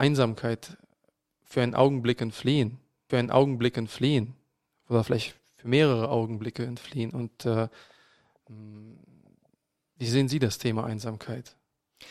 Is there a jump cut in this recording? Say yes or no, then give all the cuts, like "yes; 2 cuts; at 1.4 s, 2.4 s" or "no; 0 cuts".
yes; 1 cut; at 3.1 s